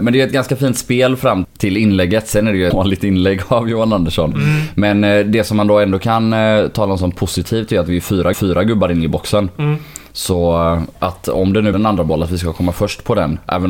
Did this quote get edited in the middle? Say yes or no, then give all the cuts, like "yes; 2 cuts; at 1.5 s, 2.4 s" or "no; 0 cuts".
yes; 4 cuts; at 1.4 s, 2.7 s, 8.3 s, 11.7 s